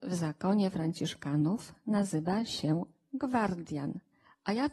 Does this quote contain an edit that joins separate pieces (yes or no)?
no